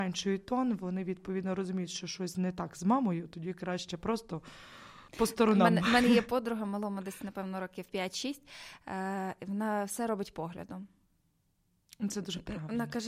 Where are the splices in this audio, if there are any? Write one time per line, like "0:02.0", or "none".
0:05.1

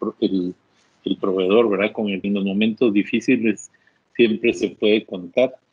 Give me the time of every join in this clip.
0:02.2

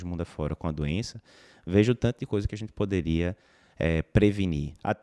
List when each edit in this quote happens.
none

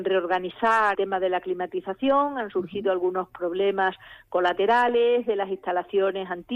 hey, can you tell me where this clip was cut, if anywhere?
0:00.9

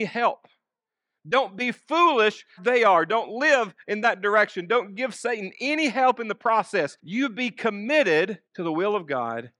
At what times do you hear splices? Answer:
0:02.6
0:07.0
0:08.5

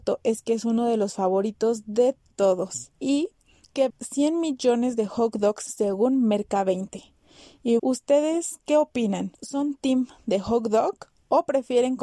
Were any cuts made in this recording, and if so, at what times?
0:02.3
0:02.9
0:03.9
0:05.7
0:07.8

